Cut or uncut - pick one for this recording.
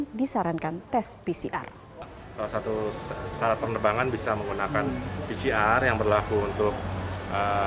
uncut